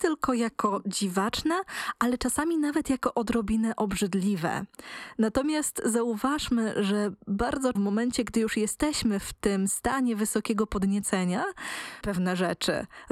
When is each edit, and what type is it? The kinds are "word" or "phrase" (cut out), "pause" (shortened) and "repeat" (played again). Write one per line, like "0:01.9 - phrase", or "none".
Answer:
0:07.8 - word
0:12.0 - word